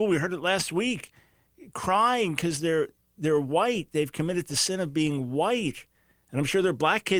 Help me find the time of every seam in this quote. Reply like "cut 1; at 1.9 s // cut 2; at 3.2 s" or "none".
none